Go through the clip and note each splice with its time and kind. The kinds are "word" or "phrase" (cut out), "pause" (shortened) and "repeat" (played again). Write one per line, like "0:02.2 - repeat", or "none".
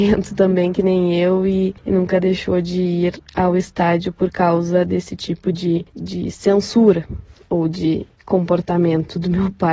none